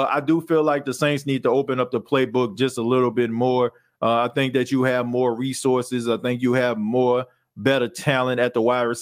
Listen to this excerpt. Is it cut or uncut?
uncut